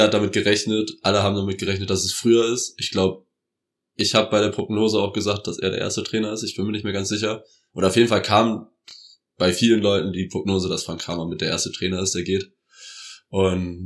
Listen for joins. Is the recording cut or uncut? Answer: uncut